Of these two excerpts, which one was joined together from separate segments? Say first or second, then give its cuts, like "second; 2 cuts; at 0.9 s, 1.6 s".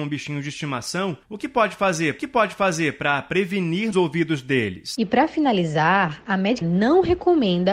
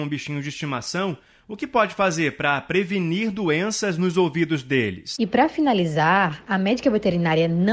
first; 4 cuts; at 1.2 s, 2.2 s, 3.9 s, 6.6 s